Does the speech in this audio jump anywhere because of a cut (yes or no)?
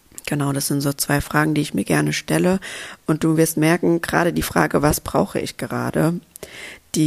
no